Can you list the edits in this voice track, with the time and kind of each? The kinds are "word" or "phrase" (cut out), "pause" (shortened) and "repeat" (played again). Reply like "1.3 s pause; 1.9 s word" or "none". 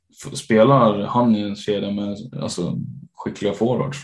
none